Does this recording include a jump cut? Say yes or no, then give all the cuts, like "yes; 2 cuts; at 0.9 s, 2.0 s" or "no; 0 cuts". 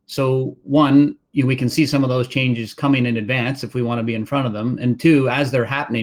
yes; 1 cut; at 1.2 s